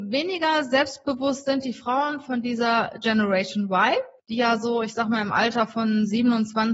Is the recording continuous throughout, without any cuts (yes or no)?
no